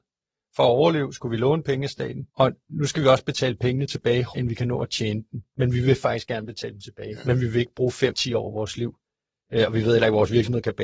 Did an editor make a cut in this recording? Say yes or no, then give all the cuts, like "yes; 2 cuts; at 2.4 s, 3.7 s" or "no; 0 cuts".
yes; 3 cuts; at 2.3 s, 4.3 s, 8.1 s